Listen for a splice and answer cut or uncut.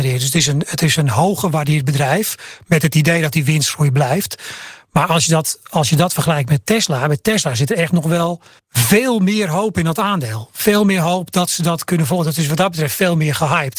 cut